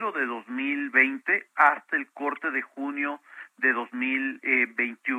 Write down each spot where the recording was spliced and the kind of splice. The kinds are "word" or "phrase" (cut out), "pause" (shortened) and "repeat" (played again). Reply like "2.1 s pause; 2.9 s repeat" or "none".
none